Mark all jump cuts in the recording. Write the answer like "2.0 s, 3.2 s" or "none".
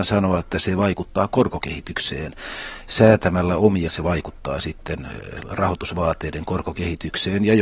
3.9 s, 5.4 s